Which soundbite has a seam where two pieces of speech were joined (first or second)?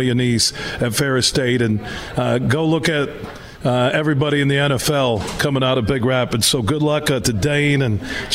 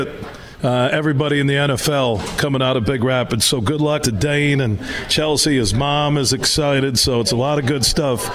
second